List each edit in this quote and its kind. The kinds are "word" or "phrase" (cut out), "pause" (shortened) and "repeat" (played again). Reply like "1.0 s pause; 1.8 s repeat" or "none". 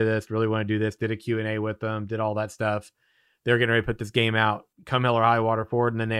4.7 s pause